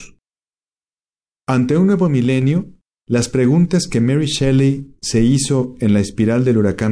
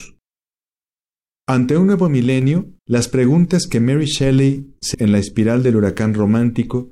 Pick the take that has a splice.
second; 2 cuts; at 2.8 s, 4.9 s

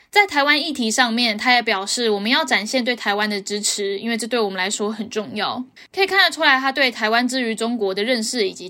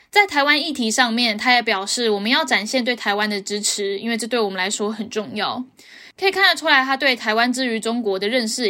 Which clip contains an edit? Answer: first; 1 cut; at 5.8 s

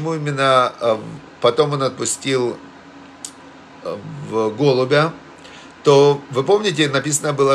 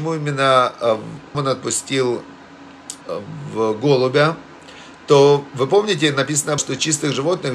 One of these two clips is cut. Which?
second; 3 cuts; at 1.3 s, 3.0 s, 6.6 s

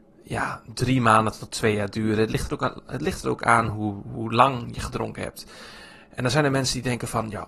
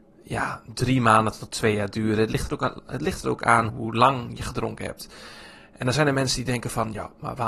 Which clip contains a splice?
second; 1 cut; at 3.7 s

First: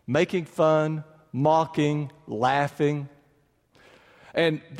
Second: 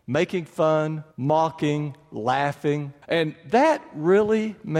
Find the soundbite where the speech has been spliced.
second; 2 cuts; at 1.1 s, 3.0 s

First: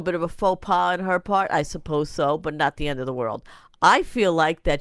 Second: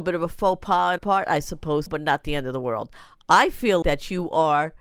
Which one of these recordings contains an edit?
second; 3 cuts; at 1.0 s, 1.9 s, 3.8 s

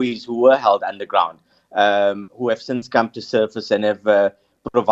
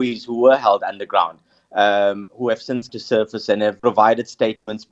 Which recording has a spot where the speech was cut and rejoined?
second; 2 cuts; at 2.9 s, 3.8 s

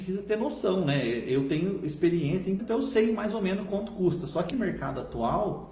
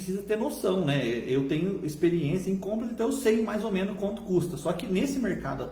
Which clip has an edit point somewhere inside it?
first; 2 cuts; at 2.6 s, 4.5 s

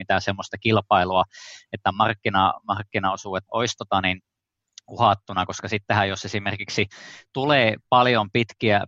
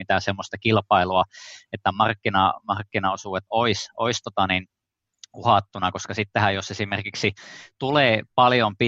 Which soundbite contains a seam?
first; 1 cut; at 3.5 s

